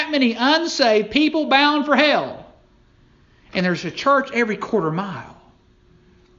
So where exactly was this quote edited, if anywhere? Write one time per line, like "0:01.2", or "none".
none